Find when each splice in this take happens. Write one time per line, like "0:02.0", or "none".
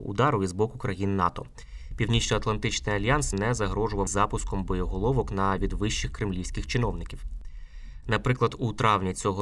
0:03.3
0:04.1
0:05.6

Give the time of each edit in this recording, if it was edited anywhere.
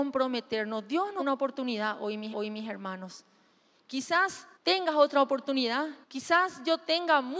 0:01.2
0:02.3
0:04.5
0:06.0

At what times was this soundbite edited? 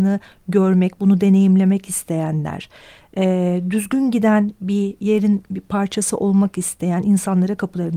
none

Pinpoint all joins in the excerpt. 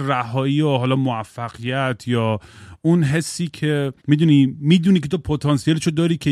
0:04.0

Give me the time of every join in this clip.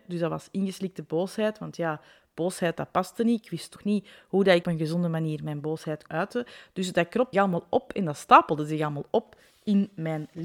0:03.8
0:04.6
0:06.1
0:07.3

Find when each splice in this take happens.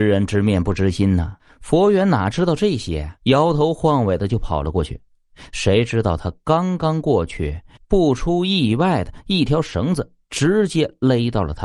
0:03.2
0:07.8

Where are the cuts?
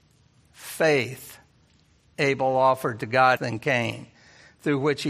0:03.4

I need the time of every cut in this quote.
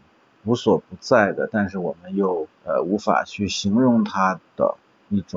0:02.6

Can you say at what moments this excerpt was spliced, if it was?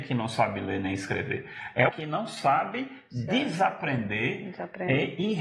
0:01.9

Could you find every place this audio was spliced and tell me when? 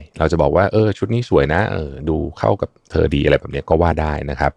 0:02.8

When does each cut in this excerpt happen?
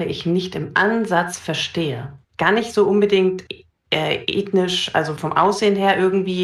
0:02.2
0:03.5
0:05.2

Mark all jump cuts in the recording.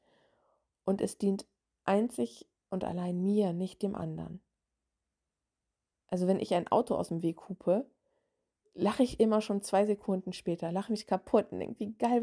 none

